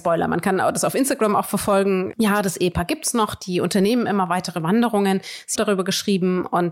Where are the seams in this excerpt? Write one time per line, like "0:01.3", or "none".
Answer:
0:05.5